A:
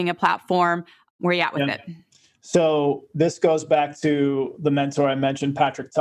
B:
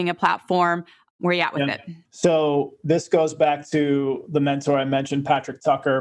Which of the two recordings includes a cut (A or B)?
B